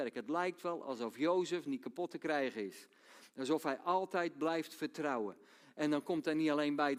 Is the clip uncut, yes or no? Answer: yes